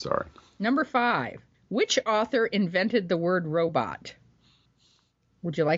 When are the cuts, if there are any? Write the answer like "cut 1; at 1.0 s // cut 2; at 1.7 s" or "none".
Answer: none